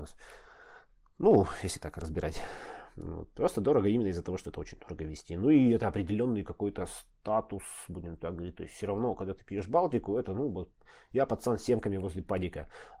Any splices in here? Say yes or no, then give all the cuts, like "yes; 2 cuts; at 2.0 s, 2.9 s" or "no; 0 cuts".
no; 0 cuts